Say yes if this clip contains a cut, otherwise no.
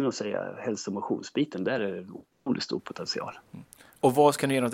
no